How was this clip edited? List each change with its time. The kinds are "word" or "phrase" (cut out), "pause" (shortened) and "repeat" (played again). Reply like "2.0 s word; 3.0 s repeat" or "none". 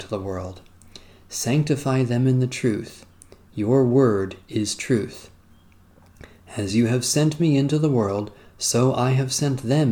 none